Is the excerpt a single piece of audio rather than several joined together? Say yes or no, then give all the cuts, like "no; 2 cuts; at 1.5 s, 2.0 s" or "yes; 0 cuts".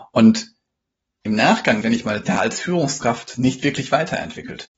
no; 2 cuts; at 1.8 s, 2.2 s